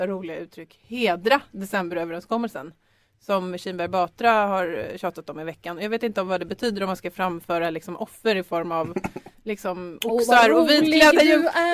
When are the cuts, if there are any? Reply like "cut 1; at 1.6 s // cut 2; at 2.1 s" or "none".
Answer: none